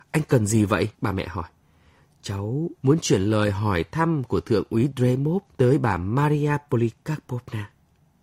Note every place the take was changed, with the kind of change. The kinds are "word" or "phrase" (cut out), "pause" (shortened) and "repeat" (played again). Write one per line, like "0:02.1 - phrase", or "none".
0:00.9 - pause
0:02.8 - pause
0:05.5 - pause